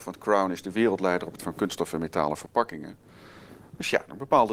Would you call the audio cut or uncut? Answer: cut